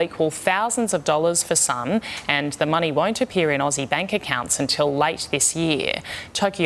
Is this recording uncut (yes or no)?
yes